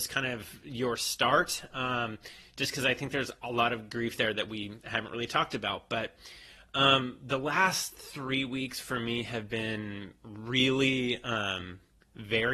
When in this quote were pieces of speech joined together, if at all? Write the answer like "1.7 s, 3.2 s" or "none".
none